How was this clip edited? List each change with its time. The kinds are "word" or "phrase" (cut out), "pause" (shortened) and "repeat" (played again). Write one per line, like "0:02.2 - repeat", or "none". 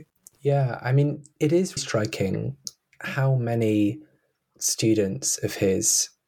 0:01.4 - word
0:01.8 - word
0:04.4 - word